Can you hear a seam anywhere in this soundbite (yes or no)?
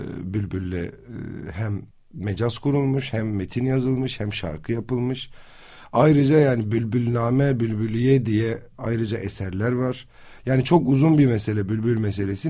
yes